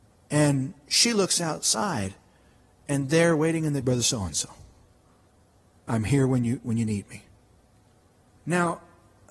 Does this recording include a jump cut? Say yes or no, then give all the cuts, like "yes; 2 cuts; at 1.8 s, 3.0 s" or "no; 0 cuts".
yes; 1 cut; at 3.8 s